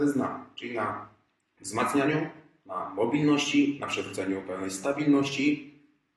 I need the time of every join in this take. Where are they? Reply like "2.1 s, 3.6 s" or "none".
none

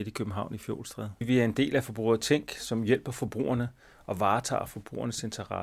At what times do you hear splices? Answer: none

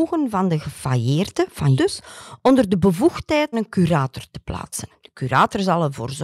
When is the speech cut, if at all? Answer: 1.8 s, 3.5 s

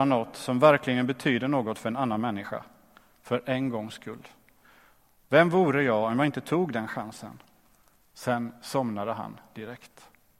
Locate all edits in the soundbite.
none

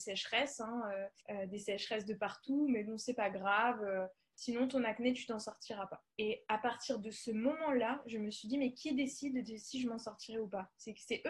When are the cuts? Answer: 1.2 s, 6.1 s

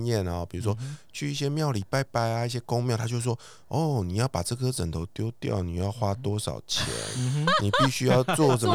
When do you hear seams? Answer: none

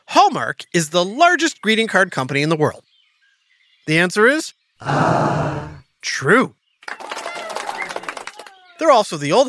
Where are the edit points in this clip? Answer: none

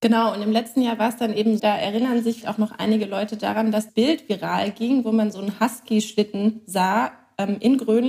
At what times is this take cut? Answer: 1.6 s, 2.4 s, 3.9 s

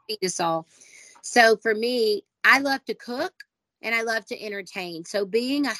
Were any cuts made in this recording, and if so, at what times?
none

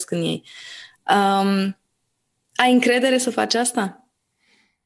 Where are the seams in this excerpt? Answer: none

